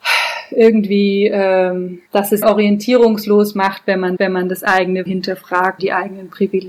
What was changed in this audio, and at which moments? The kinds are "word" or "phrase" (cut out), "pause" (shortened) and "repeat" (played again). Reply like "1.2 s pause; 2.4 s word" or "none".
2.1 s pause; 2.4 s word; 4.2 s repeat; 5.1 s word; 5.8 s word